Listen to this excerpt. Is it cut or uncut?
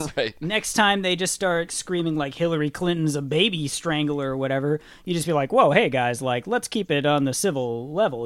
uncut